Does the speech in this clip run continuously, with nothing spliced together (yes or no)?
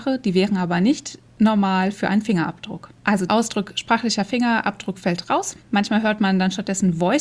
no